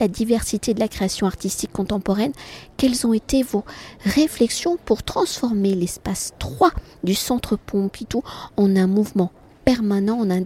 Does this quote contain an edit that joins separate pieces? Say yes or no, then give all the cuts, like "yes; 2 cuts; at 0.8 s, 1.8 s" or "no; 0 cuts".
no; 0 cuts